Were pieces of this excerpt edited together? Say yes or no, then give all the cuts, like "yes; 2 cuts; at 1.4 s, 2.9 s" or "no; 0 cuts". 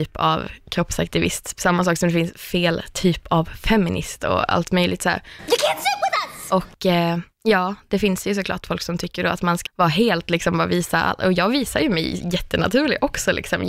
yes; 2 cuts; at 7.3 s, 9.7 s